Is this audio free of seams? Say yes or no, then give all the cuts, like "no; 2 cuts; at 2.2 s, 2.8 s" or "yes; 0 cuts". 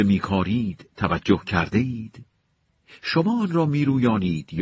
yes; 0 cuts